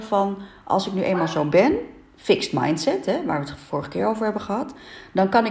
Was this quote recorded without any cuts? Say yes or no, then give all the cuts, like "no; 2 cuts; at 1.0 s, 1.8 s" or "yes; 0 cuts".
yes; 0 cuts